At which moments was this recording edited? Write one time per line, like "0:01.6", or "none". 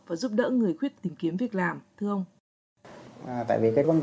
0:00.9